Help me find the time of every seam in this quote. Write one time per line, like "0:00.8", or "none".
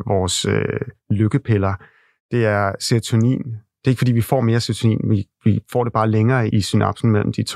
0:06.5

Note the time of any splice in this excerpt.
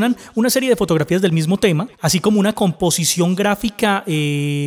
0:01.9

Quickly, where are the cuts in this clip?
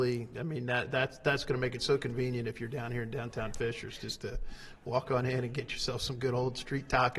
none

